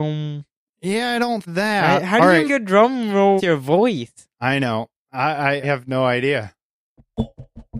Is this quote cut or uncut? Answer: cut